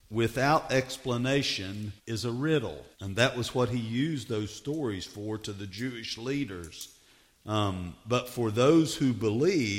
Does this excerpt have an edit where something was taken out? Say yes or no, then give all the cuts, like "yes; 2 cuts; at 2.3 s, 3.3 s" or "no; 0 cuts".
yes; 2 cuts; at 2.0 s, 2.9 s